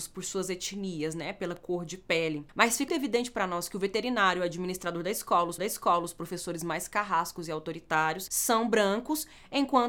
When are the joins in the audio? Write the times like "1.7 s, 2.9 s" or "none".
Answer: 2.9 s, 5.6 s